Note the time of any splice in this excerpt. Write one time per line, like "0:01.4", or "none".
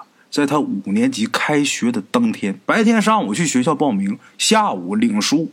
0:02.6